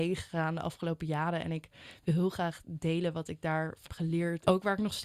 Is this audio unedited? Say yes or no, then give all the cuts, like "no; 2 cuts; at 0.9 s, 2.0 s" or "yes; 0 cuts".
no; 1 cut; at 3.9 s